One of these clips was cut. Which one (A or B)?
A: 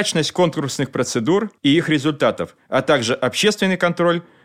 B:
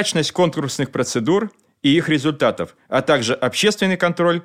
A